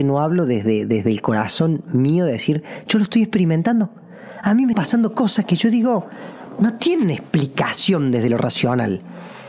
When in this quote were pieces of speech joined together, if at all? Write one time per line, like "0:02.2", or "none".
0:04.7